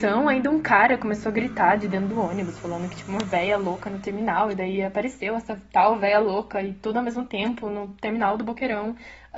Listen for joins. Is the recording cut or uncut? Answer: uncut